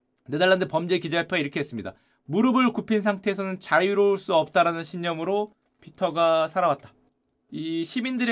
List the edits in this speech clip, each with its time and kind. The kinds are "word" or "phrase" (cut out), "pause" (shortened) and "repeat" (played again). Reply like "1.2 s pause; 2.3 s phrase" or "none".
none